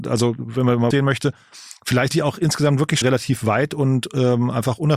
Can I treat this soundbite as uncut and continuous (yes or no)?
no